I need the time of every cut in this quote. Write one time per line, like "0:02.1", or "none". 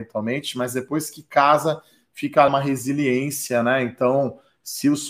0:02.5